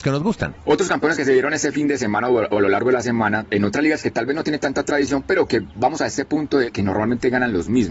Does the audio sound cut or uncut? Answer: uncut